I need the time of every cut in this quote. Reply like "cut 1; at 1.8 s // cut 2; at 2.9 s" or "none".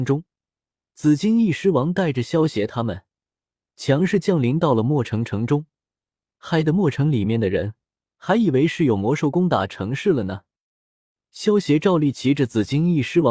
none